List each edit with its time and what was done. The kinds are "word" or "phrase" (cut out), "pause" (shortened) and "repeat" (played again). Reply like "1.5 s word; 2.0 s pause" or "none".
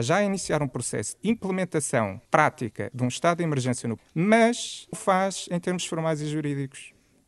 1.2 s word; 2.2 s pause; 4.0 s word; 4.9 s word